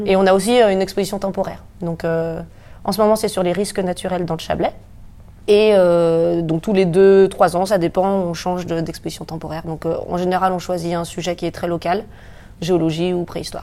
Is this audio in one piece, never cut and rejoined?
yes; 0 cuts

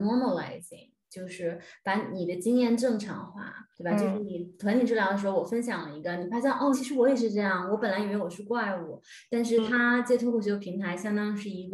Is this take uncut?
no; 2 cuts; at 3.7 s, 6.7 s

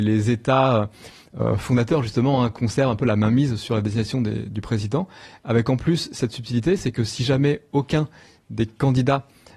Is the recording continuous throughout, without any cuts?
yes; 0 cuts

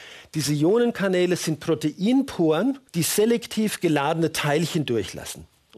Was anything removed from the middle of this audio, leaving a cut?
yes; 1 cut; at 2.9 s

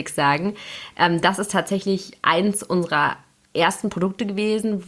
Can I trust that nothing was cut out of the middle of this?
yes; 0 cuts

